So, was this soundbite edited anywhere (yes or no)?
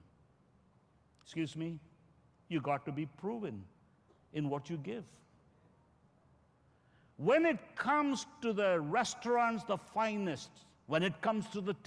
no